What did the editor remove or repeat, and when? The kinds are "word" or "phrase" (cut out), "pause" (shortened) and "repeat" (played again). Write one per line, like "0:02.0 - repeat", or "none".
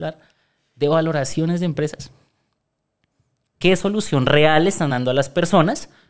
none